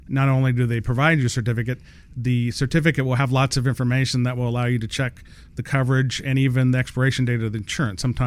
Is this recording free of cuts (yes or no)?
yes